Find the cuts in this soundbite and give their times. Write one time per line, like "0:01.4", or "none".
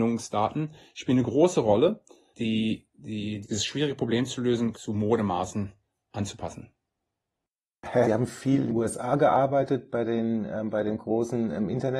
0:02.3
0:03.4
0:04.7
0:08.0
0:08.7